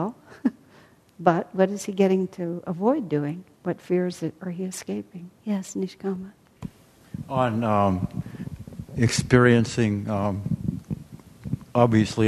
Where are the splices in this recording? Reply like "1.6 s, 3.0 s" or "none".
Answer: 3.5 s, 5.4 s